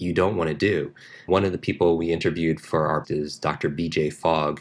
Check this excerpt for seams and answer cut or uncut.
cut